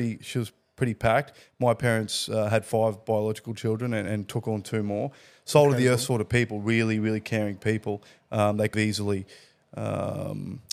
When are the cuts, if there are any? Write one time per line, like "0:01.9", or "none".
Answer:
0:08.7